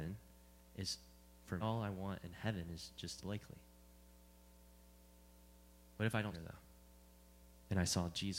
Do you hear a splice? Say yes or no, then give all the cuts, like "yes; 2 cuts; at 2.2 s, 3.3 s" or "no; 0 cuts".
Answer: yes; 3 cuts; at 1.6 s, 3.2 s, 6.3 s